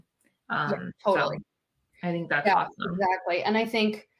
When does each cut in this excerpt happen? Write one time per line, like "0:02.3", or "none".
0:00.9